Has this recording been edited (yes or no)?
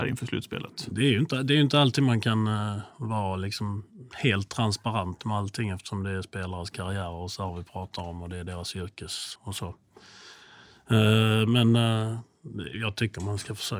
yes